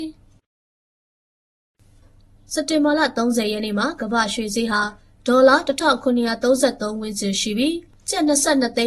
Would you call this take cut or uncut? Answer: uncut